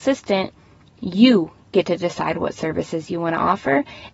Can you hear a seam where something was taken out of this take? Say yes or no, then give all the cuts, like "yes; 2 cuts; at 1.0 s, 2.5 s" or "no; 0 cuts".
no; 0 cuts